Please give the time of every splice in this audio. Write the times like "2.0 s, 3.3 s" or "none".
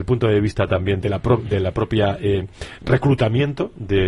1.0 s